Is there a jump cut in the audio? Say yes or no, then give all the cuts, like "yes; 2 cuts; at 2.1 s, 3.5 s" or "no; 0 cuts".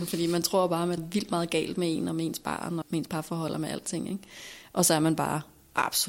yes; 2 cuts; at 1.0 s, 2.8 s